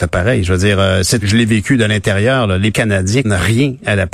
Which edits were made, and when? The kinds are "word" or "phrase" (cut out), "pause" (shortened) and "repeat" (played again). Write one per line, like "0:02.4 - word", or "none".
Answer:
0:01.2 - word
0:02.7 - word
0:03.2 - word